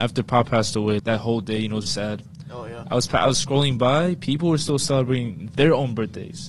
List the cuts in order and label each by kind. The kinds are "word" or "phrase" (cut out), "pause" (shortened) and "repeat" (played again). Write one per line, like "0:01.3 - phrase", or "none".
0:01.0 - word
0:01.9 - word